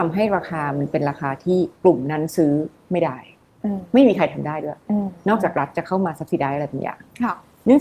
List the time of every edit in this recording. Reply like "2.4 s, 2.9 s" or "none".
1.8 s

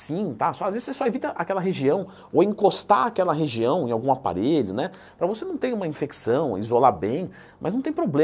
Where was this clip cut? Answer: none

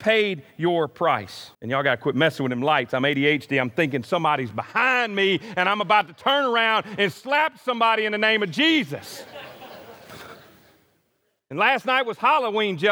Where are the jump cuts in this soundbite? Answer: 1.5 s

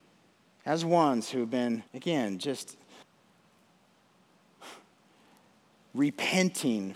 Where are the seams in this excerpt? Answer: 1.9 s, 3.0 s

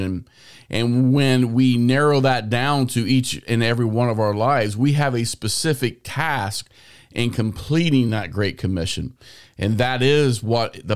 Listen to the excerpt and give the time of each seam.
none

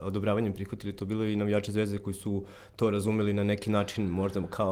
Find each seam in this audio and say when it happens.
none

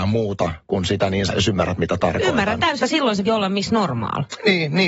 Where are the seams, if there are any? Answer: 1.3 s, 2.8 s, 3.3 s

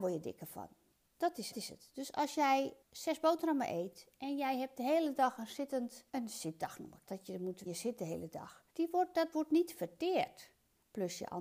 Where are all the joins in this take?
1.5 s, 2.8 s, 6.1 s, 7.1 s, 7.7 s, 8.7 s, 9.3 s

